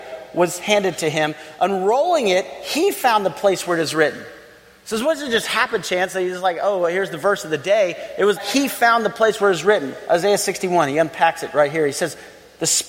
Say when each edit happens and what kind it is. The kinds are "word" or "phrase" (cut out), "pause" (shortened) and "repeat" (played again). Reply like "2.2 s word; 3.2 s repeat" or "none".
8.4 s word